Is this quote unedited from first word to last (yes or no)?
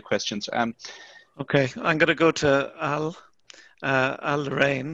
yes